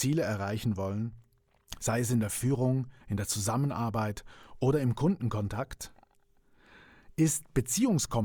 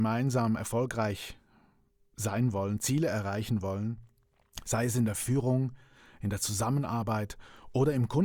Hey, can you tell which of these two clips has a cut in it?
first; 1 cut; at 3.0 s

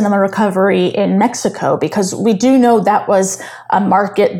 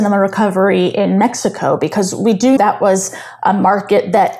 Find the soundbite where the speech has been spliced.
second; 1 cut; at 2.6 s

